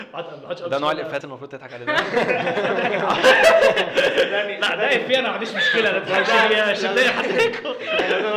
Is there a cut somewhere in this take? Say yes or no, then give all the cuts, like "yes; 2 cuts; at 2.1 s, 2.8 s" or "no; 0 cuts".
yes; 1 cut; at 1.2 s